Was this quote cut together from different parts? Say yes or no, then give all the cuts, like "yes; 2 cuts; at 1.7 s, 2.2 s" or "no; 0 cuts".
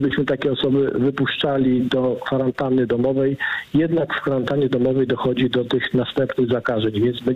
no; 0 cuts